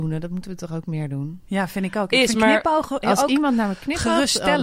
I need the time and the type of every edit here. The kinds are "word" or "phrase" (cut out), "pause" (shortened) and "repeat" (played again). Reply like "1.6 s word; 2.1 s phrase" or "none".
none